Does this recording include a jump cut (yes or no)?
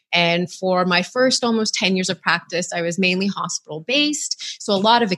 no